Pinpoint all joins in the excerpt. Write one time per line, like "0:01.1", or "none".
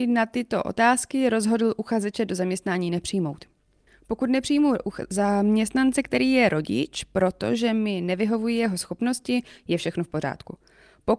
none

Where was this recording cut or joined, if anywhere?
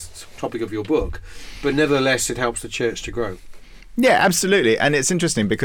none

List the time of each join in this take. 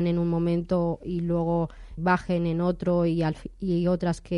0:02.0

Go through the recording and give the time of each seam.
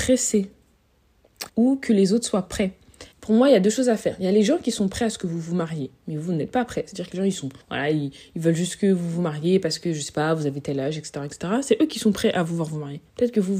0:01.5
0:03.1
0:07.6

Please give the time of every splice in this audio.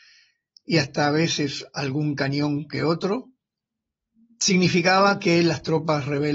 none

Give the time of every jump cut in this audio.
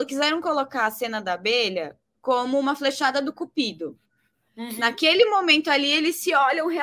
none

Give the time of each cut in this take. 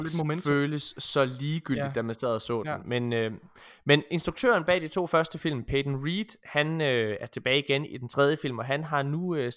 none

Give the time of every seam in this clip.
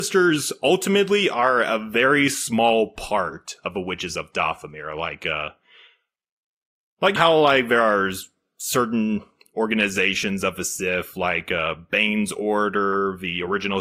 0:07.2

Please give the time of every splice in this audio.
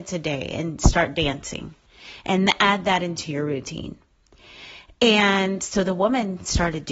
none

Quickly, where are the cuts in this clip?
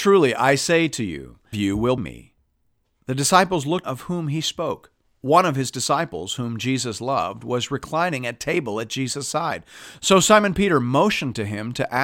0:01.5
0:02.0
0:03.8
0:05.0

